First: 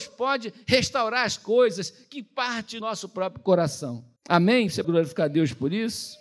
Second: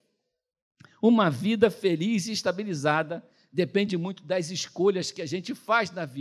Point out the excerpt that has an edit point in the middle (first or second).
first